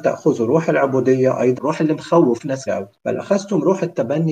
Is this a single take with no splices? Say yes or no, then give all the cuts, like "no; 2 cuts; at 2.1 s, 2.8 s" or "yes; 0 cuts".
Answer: no; 3 cuts; at 1.6 s, 2.7 s, 3.0 s